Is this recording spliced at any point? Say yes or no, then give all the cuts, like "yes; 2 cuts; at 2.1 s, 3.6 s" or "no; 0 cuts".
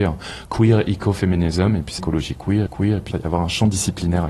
yes; 3 cuts; at 2.0 s, 2.7 s, 3.1 s